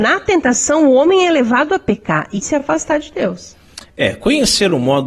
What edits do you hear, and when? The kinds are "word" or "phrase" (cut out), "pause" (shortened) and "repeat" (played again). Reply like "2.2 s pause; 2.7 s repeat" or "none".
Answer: 2.4 s word

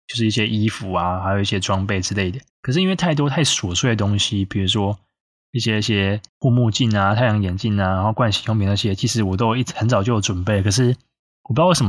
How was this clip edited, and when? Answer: 2.5 s pause; 6.3 s pause

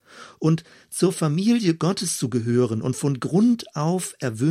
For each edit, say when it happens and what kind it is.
none

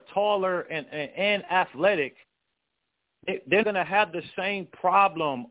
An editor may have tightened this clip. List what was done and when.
3.6 s word

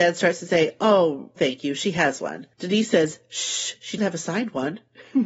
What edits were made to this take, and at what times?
1.4 s word; 4.0 s word

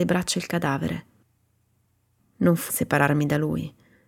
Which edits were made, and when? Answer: 2.7 s word

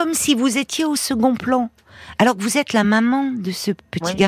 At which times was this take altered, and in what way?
none

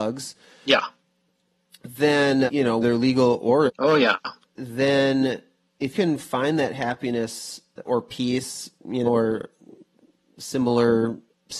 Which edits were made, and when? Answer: 2.5 s word; 2.8 s word; 3.7 s word; 4.4 s word; 5.9 s word; 7.9 s word; 9.1 s word

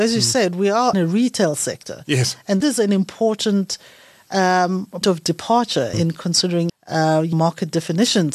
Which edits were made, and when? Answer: 0.9 s word; 2.6 s word; 5.0 s word; 5.9 s word; 6.7 s word; 7.3 s word

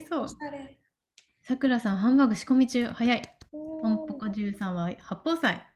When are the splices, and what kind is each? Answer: 3.5 s pause

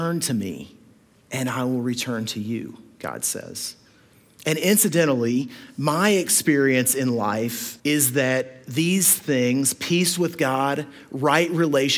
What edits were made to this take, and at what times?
7.8 s pause

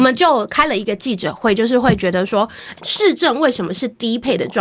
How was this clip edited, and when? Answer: 2.8 s word

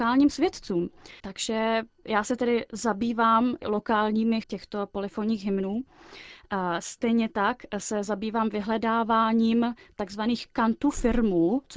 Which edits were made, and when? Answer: 1.2 s pause; 4.4 s word

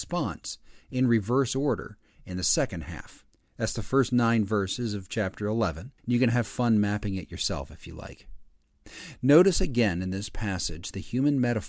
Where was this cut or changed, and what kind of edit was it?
3.3 s pause; 6.0 s pause

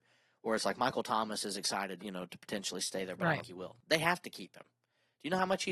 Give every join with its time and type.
2.0 s word; 3.4 s word

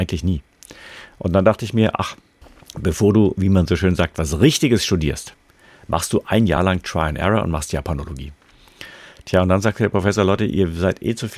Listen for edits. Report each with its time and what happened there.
none

